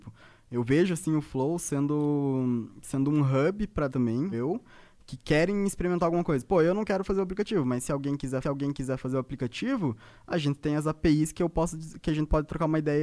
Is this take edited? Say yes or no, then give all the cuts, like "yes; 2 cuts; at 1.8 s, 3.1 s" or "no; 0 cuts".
yes; 3 cuts; at 3.9 s, 4.3 s, 8.4 s